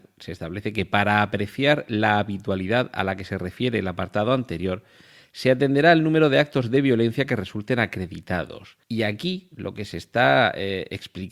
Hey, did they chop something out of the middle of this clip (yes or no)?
yes